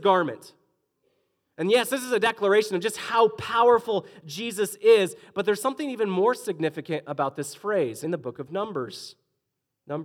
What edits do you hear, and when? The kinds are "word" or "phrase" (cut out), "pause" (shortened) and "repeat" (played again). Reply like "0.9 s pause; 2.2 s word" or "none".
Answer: 8.0 s phrase